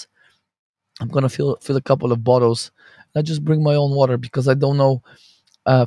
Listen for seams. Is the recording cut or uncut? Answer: uncut